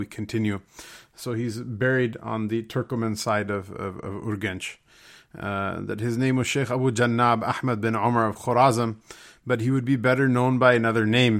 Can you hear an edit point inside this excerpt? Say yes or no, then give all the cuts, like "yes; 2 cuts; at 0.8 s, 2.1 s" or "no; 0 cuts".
no; 0 cuts